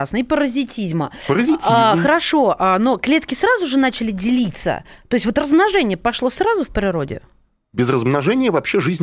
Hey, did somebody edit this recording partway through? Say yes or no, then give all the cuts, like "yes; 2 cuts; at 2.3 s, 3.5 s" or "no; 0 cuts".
no; 0 cuts